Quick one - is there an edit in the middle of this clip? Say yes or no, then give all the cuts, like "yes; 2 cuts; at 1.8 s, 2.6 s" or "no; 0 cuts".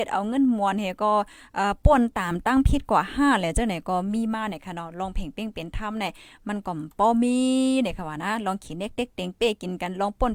no; 0 cuts